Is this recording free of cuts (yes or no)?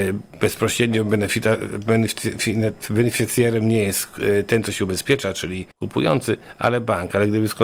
no